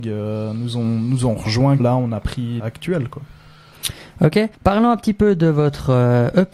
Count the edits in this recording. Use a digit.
3